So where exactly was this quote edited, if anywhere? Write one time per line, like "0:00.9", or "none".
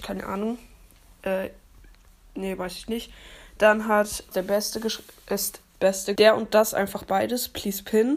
0:04.3
0:05.7
0:06.1

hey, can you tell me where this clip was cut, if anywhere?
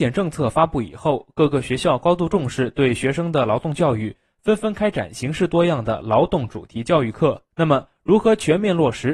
0:07.5

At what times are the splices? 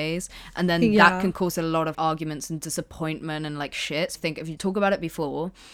0:01.9
0:04.1
0:04.6

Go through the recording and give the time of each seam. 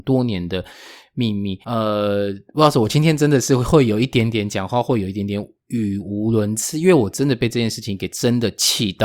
0:01.6

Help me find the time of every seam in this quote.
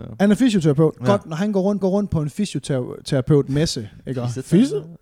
0:01.8

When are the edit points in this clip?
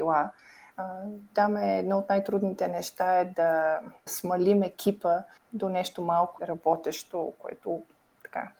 0:01.3
0:04.1
0:05.4
0:06.4

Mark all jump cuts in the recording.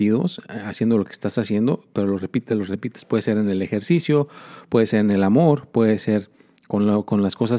none

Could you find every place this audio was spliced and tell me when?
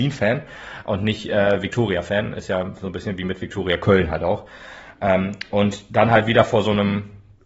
none

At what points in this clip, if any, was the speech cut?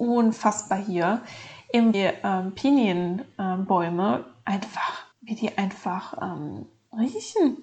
0:01.9
0:05.1

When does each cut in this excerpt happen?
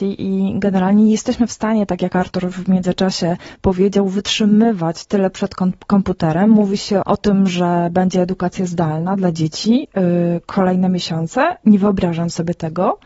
0:07.0

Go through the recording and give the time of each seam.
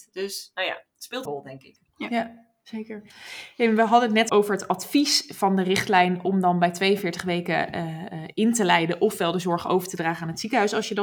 0:01.2
0:01.9
0:04.3

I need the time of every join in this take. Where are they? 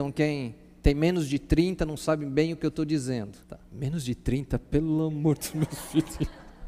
0:03.4

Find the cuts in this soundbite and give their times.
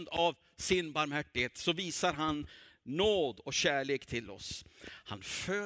none

